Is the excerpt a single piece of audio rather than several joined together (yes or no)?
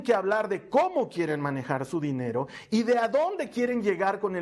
yes